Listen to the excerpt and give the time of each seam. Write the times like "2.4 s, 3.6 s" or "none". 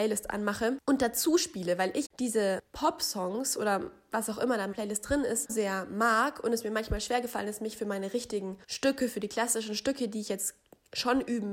2.0 s, 4.7 s, 5.5 s, 8.6 s